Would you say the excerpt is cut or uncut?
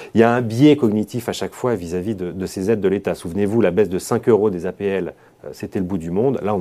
uncut